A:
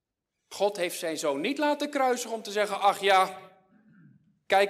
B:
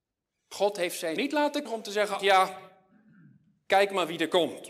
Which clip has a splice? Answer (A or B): B